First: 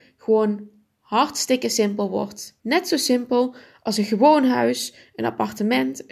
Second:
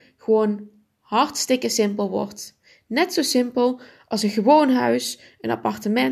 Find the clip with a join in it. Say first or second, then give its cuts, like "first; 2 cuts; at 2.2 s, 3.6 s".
first; 1 cut; at 2.6 s